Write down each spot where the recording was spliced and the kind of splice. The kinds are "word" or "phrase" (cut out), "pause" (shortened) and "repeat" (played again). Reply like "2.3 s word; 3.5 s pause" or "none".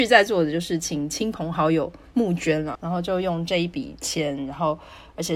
2.7 s word